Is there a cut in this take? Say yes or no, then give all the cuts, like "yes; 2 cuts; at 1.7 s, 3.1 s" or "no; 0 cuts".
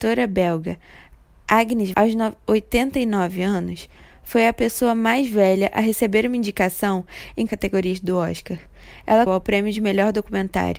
yes; 3 cuts; at 1.9 s, 7.5 s, 9.3 s